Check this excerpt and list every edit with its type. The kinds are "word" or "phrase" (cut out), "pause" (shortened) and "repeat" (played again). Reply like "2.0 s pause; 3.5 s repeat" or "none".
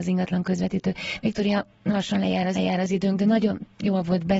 2.5 s repeat